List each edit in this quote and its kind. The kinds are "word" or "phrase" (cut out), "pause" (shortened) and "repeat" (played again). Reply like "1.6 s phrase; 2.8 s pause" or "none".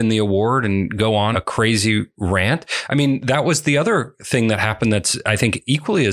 1.3 s word